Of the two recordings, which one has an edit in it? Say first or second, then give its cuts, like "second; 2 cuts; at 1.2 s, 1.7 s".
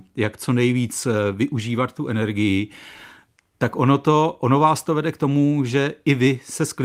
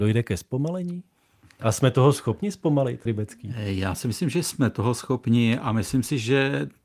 second; 1 cut; at 3.1 s